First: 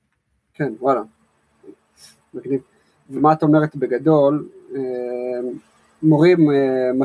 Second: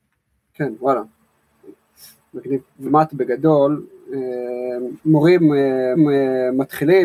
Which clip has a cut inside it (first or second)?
second